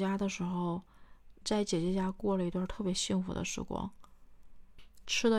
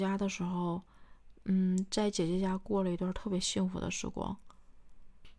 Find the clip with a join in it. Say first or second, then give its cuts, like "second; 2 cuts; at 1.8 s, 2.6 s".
first; 1 cut; at 1.4 s